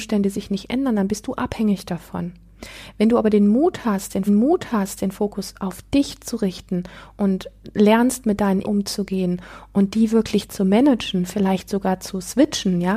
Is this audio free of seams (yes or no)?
no